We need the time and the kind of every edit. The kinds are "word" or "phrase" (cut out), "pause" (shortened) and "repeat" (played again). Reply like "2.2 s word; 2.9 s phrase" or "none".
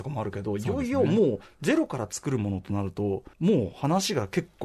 3.3 s pause

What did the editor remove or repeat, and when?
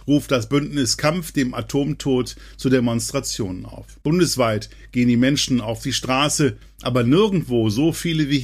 4.0 s pause

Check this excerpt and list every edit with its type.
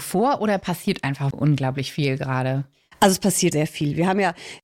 1.3 s word; 3.5 s word

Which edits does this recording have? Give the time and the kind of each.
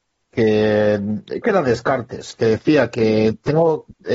1.4 s word

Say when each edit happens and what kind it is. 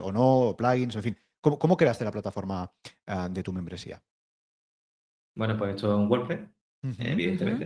none

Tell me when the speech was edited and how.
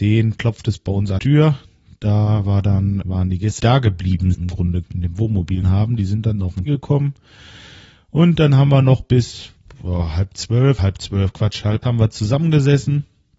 1.2 s word; 3.0 s word; 3.6 s word; 4.3 s word; 4.8 s word; 5.6 s word; 6.7 s word; 10.8 s word; 11.8 s word

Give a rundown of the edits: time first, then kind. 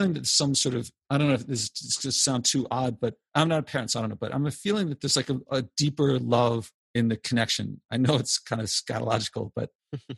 none

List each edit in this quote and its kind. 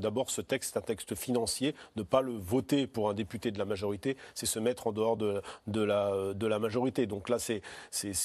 none

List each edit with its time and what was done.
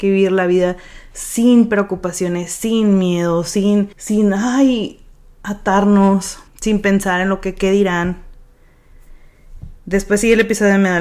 3.9 s pause; 6.5 s pause; 9.8 s pause

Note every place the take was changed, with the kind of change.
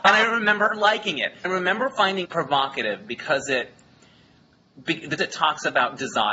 1.4 s word; 2.2 s word; 5.2 s word

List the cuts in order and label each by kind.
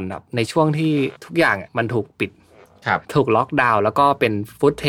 1.2 s pause; 1.7 s pause; 3.0 s pause

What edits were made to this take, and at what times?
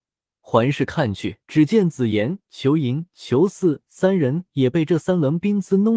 1.4 s pause

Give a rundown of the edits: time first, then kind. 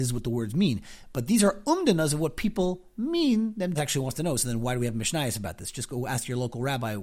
3.8 s phrase

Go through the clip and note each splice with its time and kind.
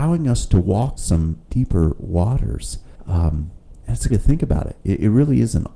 1.0 s word; 1.4 s pause; 3.0 s pause; 4.1 s phrase

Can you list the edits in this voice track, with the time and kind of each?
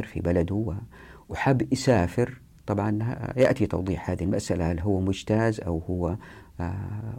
none

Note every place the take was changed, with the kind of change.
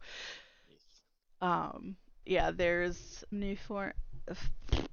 2.2 s word; 3.3 s word

